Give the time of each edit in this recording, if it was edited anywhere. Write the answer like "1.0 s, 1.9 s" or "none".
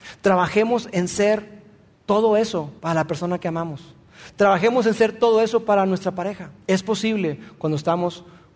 1.9 s, 2.8 s, 6.6 s